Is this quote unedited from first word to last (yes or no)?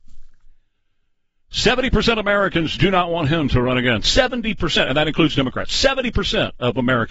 yes